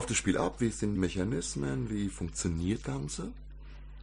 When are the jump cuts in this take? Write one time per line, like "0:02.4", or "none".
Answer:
0:01.0
0:02.8